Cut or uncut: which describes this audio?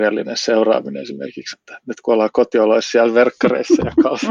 cut